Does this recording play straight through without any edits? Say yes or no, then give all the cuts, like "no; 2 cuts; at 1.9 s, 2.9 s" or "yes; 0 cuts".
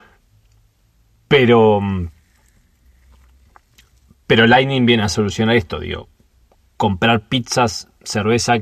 yes; 0 cuts